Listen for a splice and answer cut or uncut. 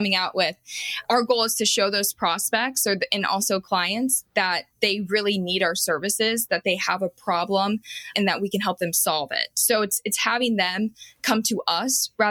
uncut